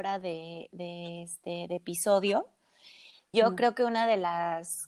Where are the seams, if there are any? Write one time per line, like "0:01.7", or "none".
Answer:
0:03.3

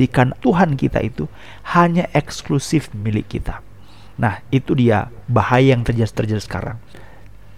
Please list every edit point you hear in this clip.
none

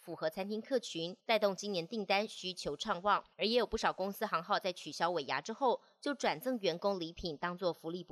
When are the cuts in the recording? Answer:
0:01.2
0:03.3

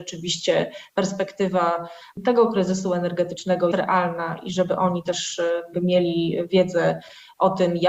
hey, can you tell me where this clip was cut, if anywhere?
0:03.7
0:05.7

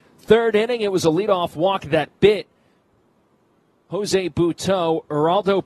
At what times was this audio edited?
none

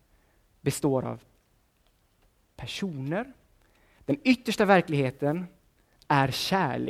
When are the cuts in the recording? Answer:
none

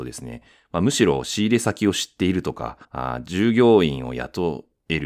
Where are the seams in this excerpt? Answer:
0:02.8

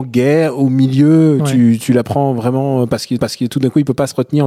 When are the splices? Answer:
0:03.2

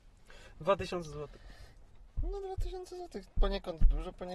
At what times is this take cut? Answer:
0:02.1

